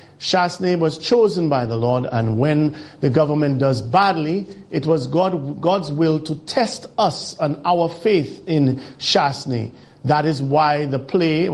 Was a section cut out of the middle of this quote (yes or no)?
no